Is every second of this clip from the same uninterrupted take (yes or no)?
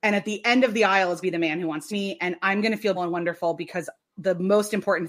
no